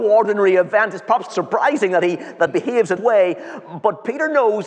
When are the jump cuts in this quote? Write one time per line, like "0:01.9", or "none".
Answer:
0:01.3
0:02.5
0:03.0